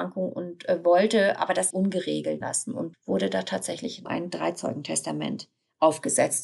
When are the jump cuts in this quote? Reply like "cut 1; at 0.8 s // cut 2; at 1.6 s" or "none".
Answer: cut 1; at 1.7 s // cut 2; at 2.4 s // cut 3; at 2.9 s // cut 4; at 4.1 s